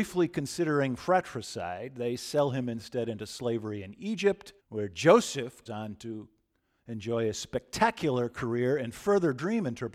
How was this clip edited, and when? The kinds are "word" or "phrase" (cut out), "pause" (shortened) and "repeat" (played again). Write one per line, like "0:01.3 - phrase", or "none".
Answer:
0:04.6 - pause
0:05.7 - word